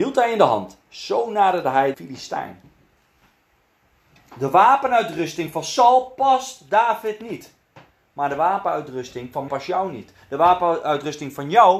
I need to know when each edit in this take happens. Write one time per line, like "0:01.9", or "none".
0:01.9
0:09.5